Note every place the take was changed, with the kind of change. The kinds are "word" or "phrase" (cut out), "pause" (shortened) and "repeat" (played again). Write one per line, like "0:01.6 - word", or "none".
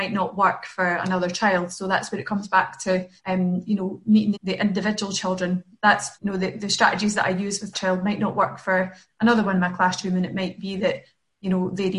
0:03.2 - pause
0:04.3 - phrase
0:06.1 - pause
0:07.7 - word

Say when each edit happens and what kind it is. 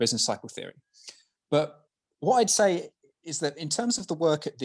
none

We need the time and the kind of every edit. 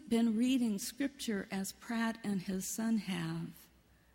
none

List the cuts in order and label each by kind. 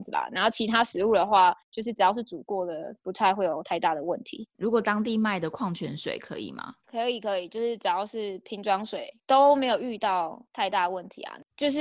0:01.6 - pause
0:04.5 - pause

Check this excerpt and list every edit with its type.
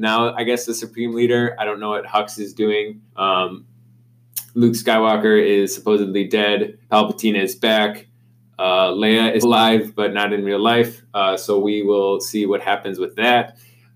0:03.1 - pause
0:06.8 - pause
0:09.4 - word

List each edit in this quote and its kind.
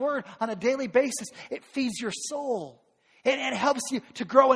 none

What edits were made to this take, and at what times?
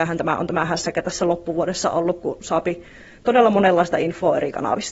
none

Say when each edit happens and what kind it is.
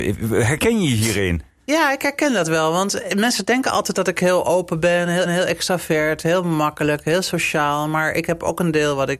0:05.3 - repeat

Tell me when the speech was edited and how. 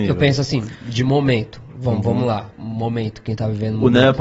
0:02.5 - pause

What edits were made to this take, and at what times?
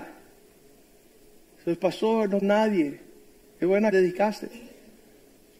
0:02.4 - word
0:03.9 - phrase

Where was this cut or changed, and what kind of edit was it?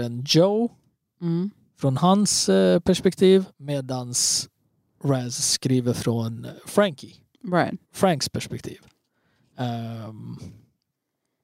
0:03.5 - pause
0:07.8 - pause

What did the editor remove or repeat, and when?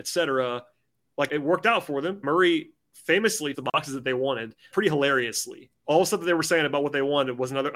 0:01.3 - word
0:02.2 - word
0:03.5 - word
0:04.7 - word
0:05.7 - word

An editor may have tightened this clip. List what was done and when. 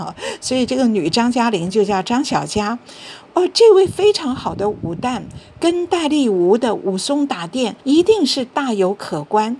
0:07.8 - pause

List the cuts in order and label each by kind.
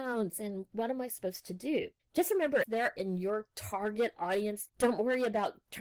0:02.6 - word
0:03.0 - word
0:04.7 - word

